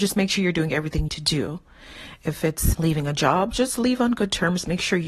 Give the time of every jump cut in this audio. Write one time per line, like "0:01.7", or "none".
0:01.1
0:02.7